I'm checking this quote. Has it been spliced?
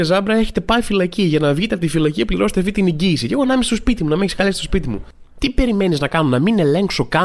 no; 0 cuts

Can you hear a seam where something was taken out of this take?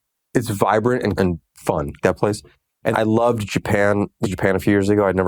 yes; 4 cuts; at 1.2 s, 2.0 s, 2.9 s, 4.2 s

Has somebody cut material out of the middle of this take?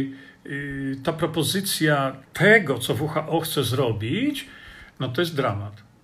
yes; 1 cut; at 2.2 s

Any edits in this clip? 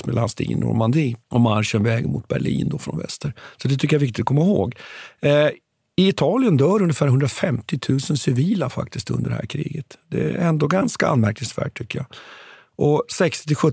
yes; 1 cut; at 1.2 s

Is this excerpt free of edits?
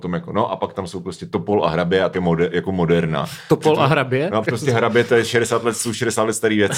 no; 2 cuts; at 2.1 s, 4.4 s

